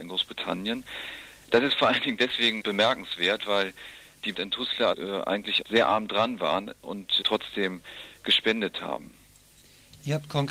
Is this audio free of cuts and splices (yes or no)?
no